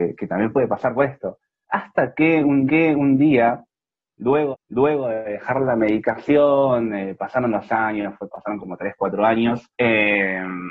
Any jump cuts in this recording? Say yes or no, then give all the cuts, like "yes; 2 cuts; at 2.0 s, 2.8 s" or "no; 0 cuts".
yes; 3 cuts; at 2.7 s, 4.5 s, 9.7 s